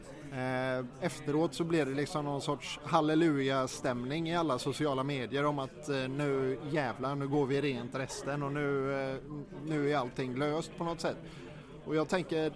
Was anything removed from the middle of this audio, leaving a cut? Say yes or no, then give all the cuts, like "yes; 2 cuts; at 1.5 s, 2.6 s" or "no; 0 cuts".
no; 0 cuts